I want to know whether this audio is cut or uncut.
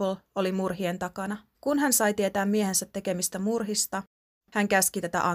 cut